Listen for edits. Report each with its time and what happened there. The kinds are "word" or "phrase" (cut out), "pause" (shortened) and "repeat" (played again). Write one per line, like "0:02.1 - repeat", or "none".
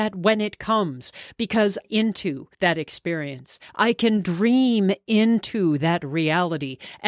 0:01.8 - phrase
0:02.5 - pause